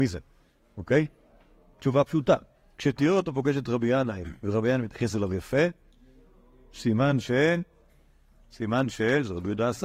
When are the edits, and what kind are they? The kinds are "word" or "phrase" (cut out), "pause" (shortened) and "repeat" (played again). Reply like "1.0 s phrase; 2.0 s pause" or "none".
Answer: none

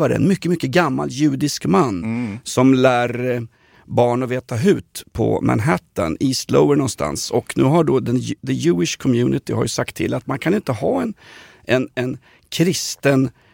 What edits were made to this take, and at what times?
none

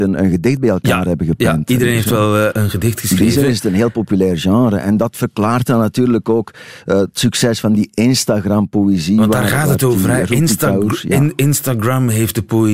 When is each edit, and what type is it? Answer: 2.5 s word

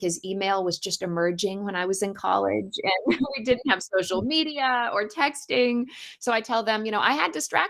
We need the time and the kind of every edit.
none

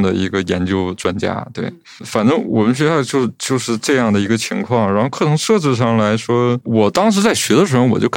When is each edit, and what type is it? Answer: 6.6 s word

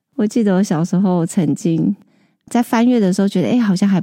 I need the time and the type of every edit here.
2.5 s word

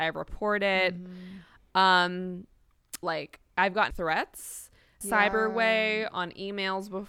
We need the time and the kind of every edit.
3.0 s phrase; 3.5 s pause; 3.9 s word; 5.0 s phrase

